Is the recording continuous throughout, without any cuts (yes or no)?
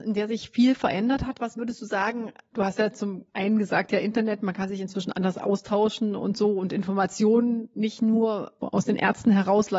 no